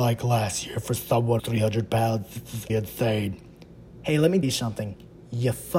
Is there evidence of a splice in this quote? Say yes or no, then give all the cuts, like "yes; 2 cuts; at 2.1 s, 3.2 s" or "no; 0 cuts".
yes; 3 cuts; at 1.4 s, 2.7 s, 4.4 s